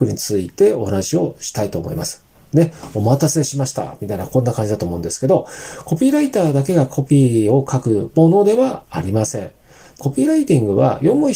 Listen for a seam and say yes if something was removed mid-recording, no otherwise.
yes